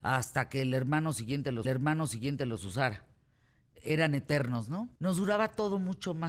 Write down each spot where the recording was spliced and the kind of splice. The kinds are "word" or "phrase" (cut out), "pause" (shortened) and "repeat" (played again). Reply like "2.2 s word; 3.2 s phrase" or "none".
1.6 s repeat; 5.0 s pause